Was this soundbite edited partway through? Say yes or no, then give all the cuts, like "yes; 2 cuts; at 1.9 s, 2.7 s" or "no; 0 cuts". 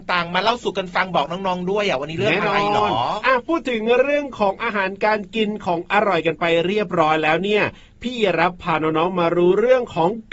no; 0 cuts